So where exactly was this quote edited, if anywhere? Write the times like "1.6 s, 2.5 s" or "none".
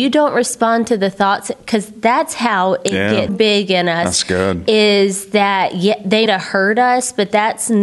3.3 s, 6.3 s